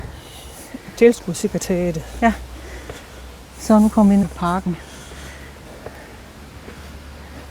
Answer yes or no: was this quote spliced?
yes